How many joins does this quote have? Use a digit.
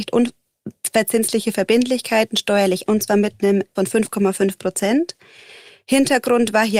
2